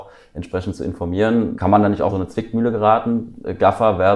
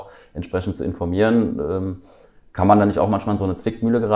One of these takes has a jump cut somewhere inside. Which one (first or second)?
first